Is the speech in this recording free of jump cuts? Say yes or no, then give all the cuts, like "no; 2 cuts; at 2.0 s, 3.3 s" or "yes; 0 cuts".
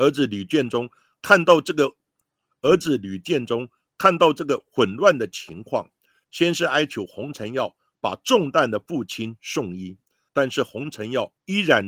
yes; 0 cuts